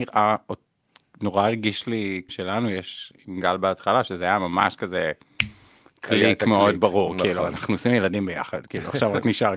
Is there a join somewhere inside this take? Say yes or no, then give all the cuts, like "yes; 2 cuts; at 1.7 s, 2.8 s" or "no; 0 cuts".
yes; 1 cut; at 2.3 s